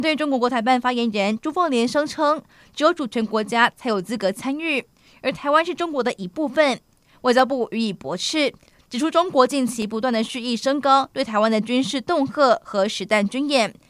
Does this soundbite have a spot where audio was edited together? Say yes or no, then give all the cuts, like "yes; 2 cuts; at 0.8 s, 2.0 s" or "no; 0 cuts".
no; 0 cuts